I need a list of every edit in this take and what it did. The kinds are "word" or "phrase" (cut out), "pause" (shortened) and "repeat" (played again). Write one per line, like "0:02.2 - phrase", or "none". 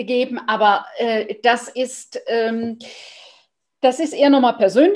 none